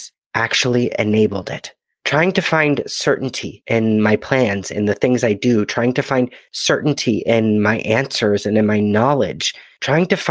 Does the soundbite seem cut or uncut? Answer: uncut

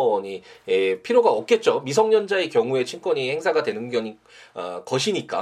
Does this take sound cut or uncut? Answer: uncut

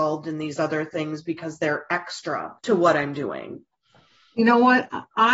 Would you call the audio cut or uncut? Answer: cut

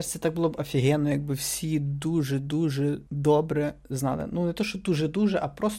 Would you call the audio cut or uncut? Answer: cut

